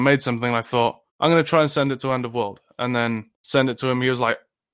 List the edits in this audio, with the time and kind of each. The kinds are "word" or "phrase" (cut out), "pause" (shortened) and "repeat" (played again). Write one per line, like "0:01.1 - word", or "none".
0:01.1 - pause
0:03.3 - pause